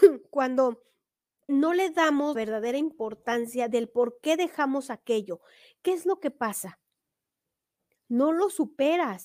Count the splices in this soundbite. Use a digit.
2